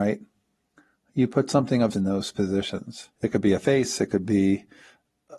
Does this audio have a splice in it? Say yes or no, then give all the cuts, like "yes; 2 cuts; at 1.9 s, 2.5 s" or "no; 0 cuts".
yes; 2 cuts; at 1.9 s, 3.1 s